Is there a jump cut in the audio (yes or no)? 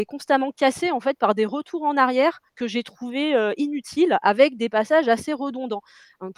yes